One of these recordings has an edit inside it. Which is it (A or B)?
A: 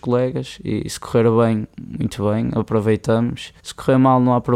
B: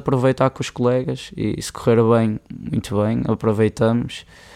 A